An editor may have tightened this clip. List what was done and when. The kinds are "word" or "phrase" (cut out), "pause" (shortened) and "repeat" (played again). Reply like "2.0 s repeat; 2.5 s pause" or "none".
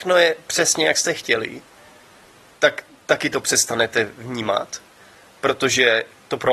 none